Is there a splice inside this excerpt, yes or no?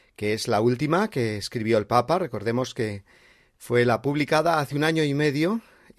no